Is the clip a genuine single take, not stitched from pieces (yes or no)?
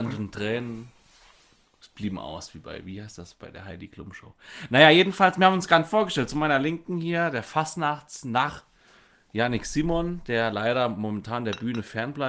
yes